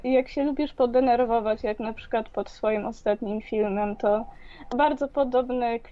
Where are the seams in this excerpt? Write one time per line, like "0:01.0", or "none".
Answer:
0:04.7